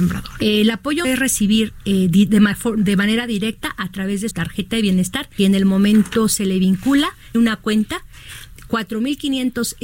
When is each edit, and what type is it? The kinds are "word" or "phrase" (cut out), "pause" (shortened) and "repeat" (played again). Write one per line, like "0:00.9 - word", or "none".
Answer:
0:01.0 - word
0:04.3 - word
0:05.4 - word
0:07.3 - word